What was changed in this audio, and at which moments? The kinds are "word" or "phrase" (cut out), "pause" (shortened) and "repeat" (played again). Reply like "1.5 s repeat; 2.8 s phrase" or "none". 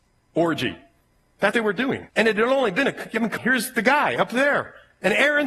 1.5 s word; 2.1 s pause; 3.4 s word